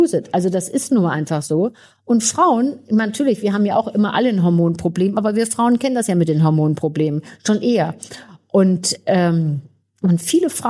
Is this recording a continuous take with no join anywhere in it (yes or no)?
yes